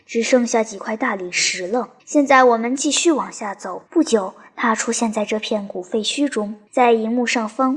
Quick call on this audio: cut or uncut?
cut